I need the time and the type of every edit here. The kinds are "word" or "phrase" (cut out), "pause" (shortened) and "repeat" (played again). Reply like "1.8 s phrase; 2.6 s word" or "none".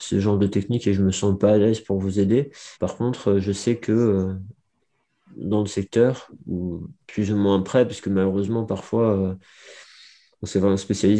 2.7 s pause